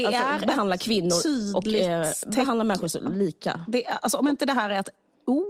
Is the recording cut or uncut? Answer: uncut